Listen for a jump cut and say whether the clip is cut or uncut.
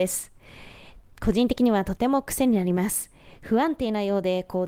uncut